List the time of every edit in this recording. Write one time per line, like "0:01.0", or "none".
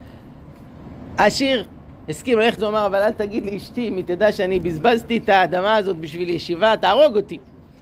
0:02.6